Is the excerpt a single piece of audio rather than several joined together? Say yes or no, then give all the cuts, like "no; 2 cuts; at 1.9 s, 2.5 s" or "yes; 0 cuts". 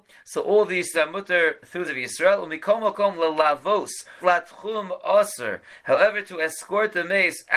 no; 3 cuts; at 0.9 s, 1.8 s, 4.2 s